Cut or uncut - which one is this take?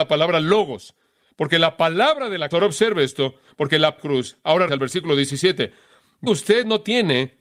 cut